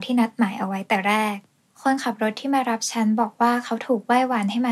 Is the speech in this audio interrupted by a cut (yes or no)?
no